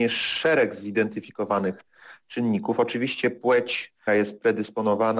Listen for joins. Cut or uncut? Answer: cut